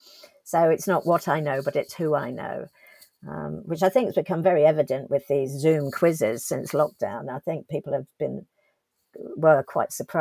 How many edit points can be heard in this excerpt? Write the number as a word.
zero